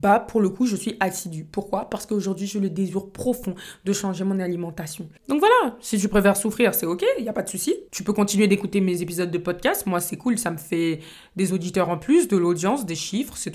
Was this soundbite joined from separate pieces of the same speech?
yes; 2 cuts; at 5.2 s, 7.9 s

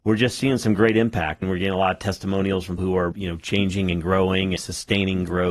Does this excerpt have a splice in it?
yes; 4 cuts; at 1.4 s, 2.8 s, 3.1 s, 4.6 s

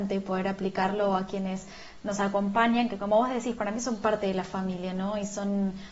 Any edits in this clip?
no; 0 cuts

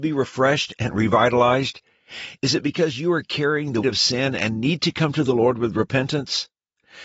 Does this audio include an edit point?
yes; 1 cut; at 3.8 s

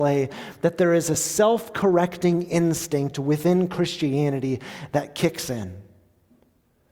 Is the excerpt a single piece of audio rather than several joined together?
yes; 0 cuts

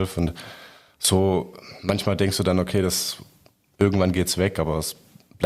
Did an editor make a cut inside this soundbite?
no; 0 cuts

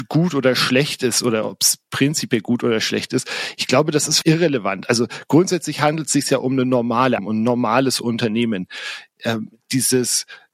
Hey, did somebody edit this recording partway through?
yes; 2 cuts; at 4.2 s, 7.2 s

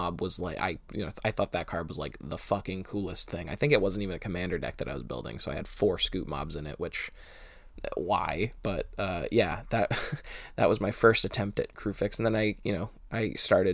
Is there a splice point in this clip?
no; 0 cuts

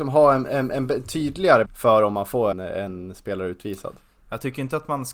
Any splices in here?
yes; 2 cuts; at 1.7 s, 2.5 s

